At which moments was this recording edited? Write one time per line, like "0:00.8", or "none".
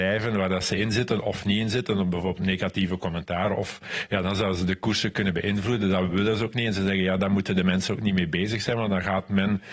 none